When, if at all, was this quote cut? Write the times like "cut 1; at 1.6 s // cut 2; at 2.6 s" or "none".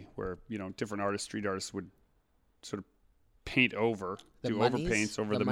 none